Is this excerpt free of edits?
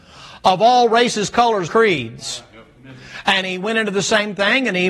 no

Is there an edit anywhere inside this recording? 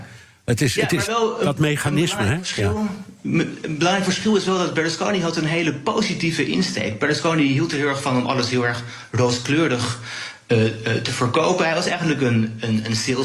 no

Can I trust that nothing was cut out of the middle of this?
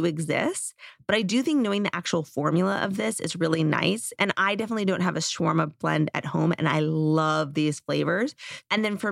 yes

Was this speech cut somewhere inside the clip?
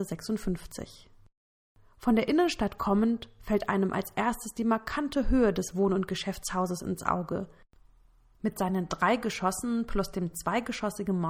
no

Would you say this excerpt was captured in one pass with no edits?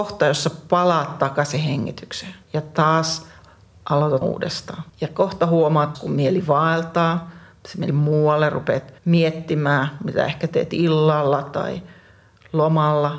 no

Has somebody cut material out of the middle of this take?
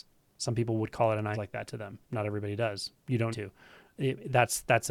yes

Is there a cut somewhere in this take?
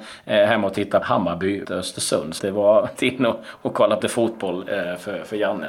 yes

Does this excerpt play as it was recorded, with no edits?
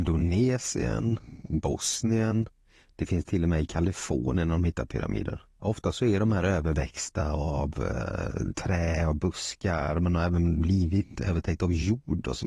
yes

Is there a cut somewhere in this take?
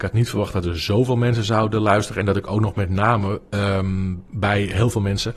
no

